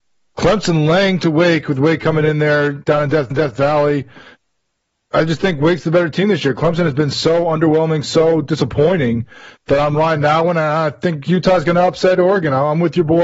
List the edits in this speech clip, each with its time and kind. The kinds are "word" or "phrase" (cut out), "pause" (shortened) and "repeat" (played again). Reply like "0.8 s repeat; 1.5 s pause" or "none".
3.3 s repeat

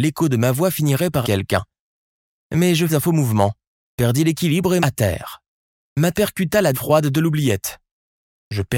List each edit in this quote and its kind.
1.2 s word; 2.9 s word; 4.8 s word; 6.1 s word; 6.7 s word

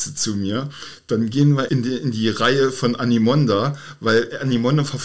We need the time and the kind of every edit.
1.7 s word

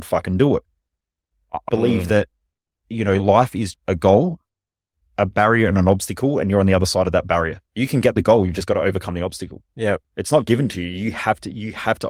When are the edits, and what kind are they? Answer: 1.7 s word; 3.7 s word; 7.7 s pause

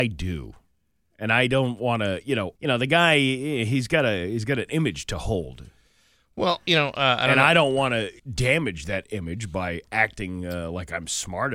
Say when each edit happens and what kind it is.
2.6 s pause; 8.2 s pause

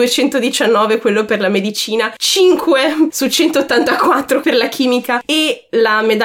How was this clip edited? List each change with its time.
none

